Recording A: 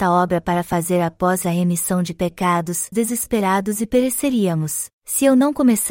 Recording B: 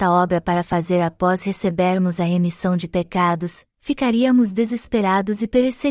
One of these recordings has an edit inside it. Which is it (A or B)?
A